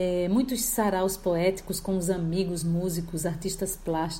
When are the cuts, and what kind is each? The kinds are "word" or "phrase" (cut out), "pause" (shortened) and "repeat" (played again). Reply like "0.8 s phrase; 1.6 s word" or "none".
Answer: none